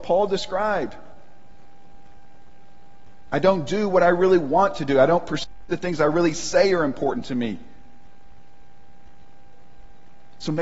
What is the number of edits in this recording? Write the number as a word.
zero